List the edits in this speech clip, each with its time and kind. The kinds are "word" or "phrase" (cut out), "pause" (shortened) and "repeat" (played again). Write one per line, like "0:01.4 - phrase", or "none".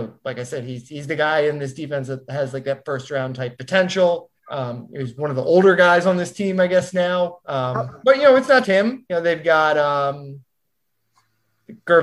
0:04.4 - pause
0:07.4 - pause
0:08.6 - word